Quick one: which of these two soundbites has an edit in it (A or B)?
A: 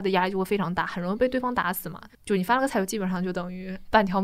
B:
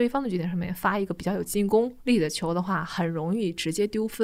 A